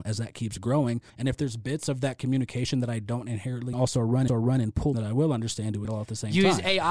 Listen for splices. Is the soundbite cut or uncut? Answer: cut